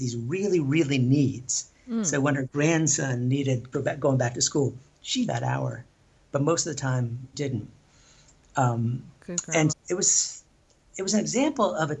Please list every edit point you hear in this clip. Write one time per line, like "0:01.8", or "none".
0:03.7
0:05.3
0:07.3
0:09.7